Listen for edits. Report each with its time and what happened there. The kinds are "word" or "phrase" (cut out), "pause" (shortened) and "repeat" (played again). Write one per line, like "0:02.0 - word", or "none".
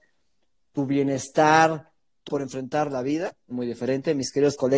0:02.3 - word
0:03.5 - phrase